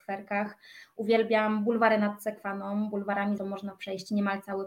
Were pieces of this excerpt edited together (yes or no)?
yes